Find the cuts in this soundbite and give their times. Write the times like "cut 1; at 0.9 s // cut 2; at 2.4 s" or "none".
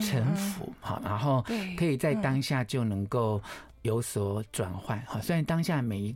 cut 1; at 1.0 s